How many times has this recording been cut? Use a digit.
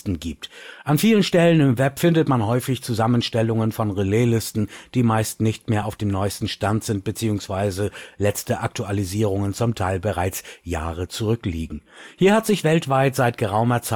0